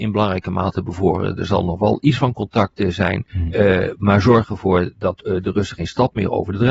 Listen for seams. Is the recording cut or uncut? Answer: cut